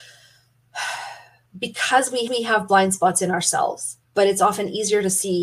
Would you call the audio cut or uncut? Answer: cut